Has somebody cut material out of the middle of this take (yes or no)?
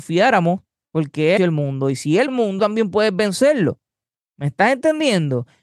yes